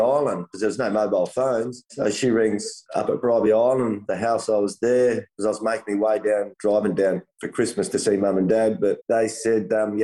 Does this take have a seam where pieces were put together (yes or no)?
no